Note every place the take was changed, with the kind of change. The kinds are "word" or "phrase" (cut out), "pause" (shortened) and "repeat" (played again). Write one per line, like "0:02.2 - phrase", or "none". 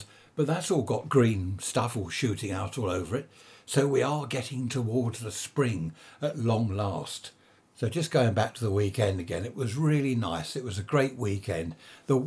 none

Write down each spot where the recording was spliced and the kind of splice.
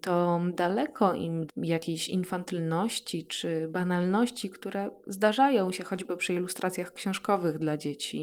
0:01.5 - word

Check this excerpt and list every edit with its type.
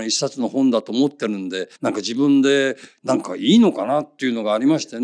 0:01.8 - pause

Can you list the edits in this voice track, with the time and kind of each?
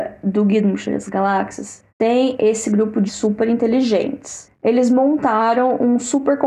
0:01.9 - pause
0:03.1 - word

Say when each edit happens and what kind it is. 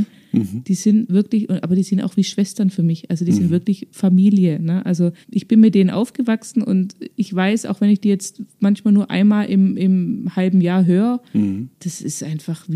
0:05.2 - pause

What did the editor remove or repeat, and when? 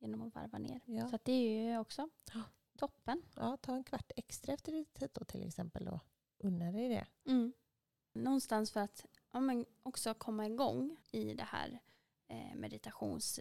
0:05.1 - word
0:11.0 - pause

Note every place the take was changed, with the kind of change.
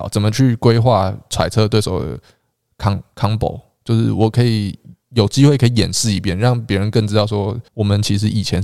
0:05.0 - pause
0:07.7 - pause

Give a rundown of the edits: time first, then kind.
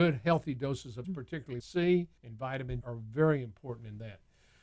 0:01.0 - word
0:01.6 - word
0:02.2 - pause
0:02.8 - word

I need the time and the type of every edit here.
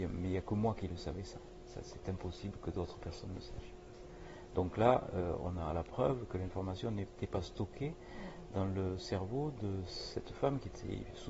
none

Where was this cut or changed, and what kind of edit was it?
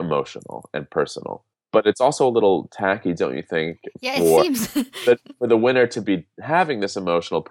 0:01.5 - pause

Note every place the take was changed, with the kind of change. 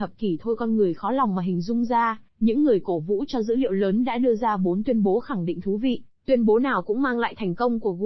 0:02.3 - pause

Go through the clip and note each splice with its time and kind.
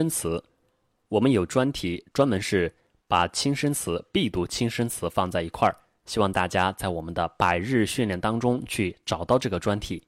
none

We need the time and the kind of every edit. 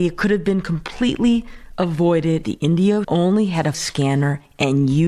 0:02.4 - word
0:03.0 - word
0:03.7 - word

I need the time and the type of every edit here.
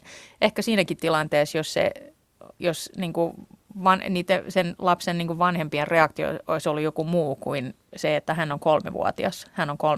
none

